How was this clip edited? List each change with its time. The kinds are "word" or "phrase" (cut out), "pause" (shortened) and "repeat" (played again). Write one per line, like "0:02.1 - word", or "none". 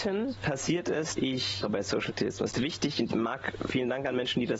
0:01.2 - word
0:01.6 - word
0:02.1 - word
0:02.5 - word
0:03.1 - word
0:03.7 - word